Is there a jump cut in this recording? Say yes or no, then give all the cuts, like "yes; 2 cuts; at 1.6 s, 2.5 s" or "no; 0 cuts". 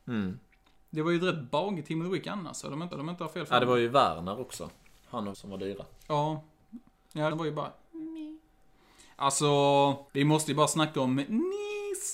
yes; 4 cuts; at 2.9 s, 5.3 s, 7.3 s, 10.1 s